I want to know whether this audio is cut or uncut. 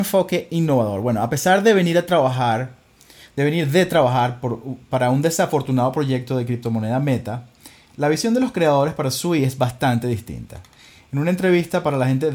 uncut